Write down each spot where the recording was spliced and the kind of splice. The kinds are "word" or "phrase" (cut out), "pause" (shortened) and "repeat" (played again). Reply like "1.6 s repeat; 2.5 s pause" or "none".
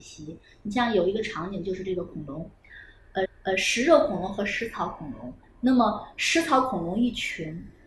3.3 s repeat